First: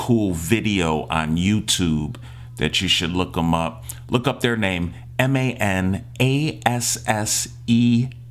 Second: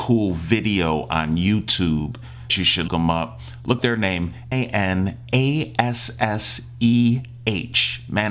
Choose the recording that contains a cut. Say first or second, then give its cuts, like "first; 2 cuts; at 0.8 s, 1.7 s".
second; 4 cuts; at 2.5 s, 2.9 s, 3.8 s, 4.5 s